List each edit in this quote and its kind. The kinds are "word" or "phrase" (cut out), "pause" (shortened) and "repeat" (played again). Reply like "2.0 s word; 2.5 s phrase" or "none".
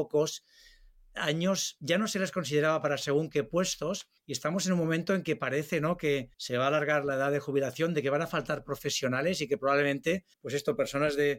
4.2 s pause; 6.3 s pause; 10.3 s pause